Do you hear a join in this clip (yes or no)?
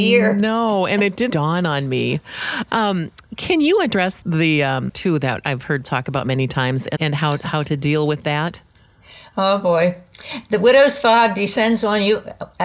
yes